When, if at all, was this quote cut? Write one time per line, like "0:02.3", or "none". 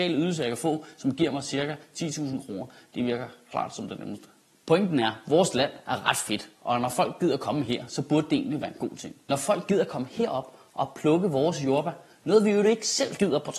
0:04.5